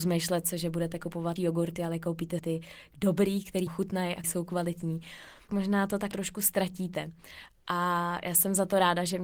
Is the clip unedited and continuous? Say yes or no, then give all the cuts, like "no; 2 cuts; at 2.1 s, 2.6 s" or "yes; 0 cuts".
no; 6 cuts; at 1.4 s, 2.4 s, 3.7 s, 4.2 s, 5.5 s, 6.1 s